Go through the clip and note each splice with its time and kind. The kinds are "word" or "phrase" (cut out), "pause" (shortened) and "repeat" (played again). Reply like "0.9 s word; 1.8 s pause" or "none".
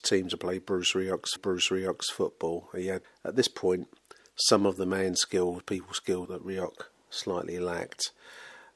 1.4 s repeat; 3.0 s word; 6.2 s word